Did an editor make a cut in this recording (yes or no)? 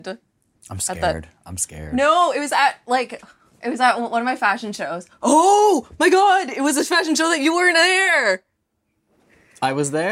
no